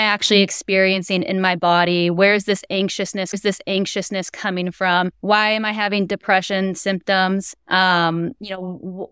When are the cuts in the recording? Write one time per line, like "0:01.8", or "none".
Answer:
0:03.3
0:05.1
0:07.6